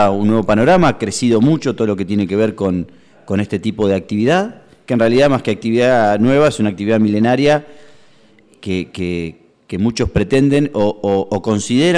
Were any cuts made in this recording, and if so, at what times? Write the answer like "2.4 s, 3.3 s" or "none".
none